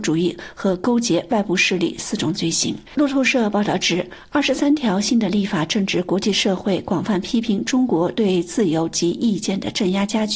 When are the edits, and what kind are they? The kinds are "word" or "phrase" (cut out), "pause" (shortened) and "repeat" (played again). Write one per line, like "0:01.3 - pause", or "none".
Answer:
0:02.9 - pause